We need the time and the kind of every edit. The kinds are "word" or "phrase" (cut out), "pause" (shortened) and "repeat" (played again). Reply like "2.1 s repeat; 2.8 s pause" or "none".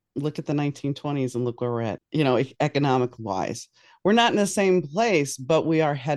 2.0 s word

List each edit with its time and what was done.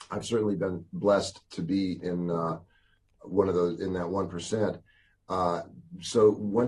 2.0 s word

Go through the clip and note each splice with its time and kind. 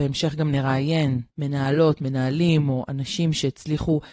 1.3 s pause

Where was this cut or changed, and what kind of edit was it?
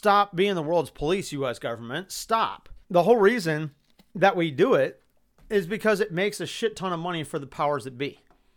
2.8 s pause; 3.9 s pause; 5.1 s pause

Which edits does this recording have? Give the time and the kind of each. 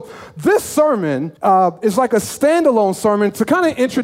1.4 s pause

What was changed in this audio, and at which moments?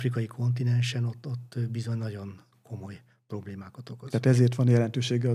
none

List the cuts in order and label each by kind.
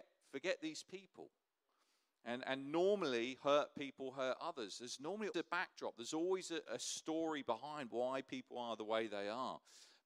5.3 s word

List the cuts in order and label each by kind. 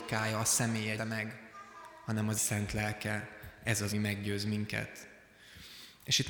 1.0 s word; 2.4 s word; 3.9 s word

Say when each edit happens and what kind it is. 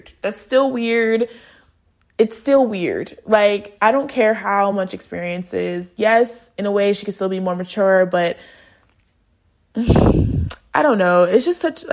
none

